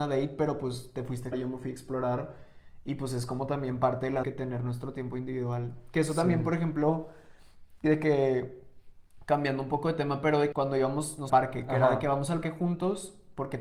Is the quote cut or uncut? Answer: cut